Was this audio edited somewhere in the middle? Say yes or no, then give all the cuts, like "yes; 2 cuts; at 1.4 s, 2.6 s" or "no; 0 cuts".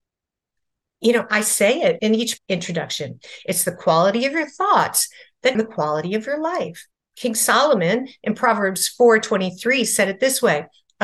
yes; 4 cuts; at 2.0 s, 2.4 s, 5.5 s, 6.9 s